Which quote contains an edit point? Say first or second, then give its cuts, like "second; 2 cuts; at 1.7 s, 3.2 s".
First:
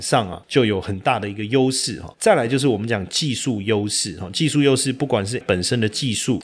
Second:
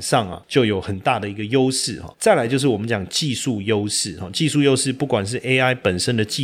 first; 1 cut; at 5.4 s